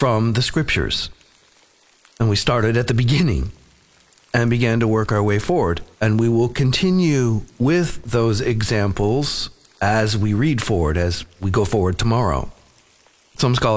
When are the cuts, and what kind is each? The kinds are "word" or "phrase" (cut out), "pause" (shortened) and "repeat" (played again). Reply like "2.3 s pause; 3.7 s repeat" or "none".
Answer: 5.9 s pause